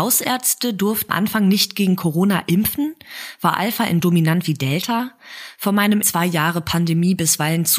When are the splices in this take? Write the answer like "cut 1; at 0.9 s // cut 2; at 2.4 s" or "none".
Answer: cut 1; at 1.1 s // cut 2; at 4.0 s // cut 3; at 6.0 s